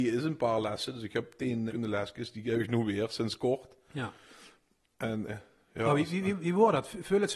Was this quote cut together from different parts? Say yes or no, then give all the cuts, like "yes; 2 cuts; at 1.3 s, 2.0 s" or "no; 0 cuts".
yes; 2 cuts; at 1.7 s, 5.3 s